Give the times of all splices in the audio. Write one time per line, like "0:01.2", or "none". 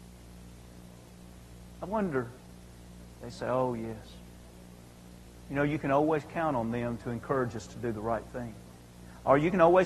none